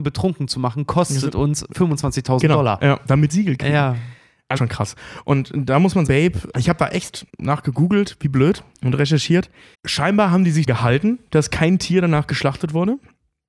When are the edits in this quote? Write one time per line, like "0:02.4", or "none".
0:03.3
0:04.6
0:06.1
0:06.5
0:07.3
0:08.7
0:09.7
0:10.7